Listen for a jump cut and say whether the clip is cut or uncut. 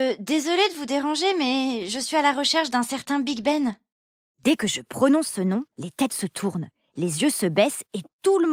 cut